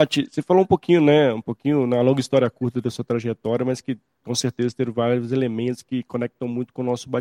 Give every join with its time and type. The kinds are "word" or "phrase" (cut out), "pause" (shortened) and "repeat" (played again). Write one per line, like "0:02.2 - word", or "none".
none